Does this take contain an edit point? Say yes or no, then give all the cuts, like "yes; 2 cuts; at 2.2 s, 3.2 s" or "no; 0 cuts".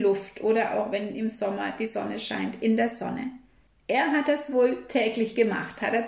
no; 0 cuts